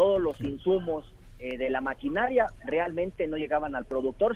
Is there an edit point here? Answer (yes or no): no